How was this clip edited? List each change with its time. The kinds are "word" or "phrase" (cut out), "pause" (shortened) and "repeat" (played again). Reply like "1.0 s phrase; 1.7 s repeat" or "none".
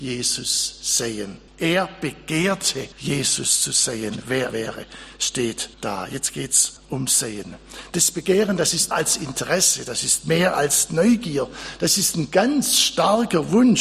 1.5 s pause; 2.9 s pause; 4.5 s word; 5.7 s pause; 6.8 s pause; 8.9 s word